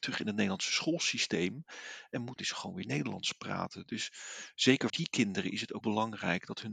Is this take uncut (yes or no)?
no